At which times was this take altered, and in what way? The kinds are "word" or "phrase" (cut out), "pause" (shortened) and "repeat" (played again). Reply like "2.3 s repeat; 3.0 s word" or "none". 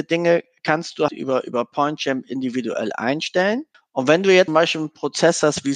1.1 s word; 3.7 s pause; 4.5 s word